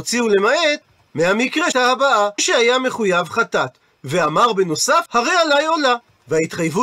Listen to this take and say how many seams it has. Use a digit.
3